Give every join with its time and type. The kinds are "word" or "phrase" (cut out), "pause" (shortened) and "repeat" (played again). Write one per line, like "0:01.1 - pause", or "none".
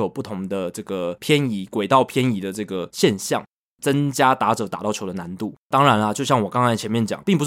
0:05.6 - pause